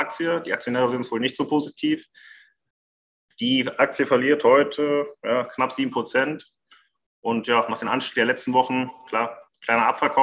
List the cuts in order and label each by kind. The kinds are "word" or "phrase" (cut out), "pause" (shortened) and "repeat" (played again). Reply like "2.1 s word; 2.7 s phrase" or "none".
none